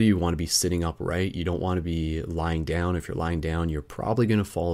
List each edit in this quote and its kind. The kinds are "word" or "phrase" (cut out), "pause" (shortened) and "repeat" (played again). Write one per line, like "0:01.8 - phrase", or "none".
none